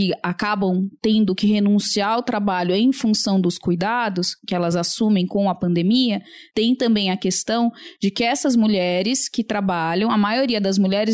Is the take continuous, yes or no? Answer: yes